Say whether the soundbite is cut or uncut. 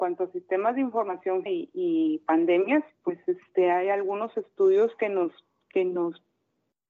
cut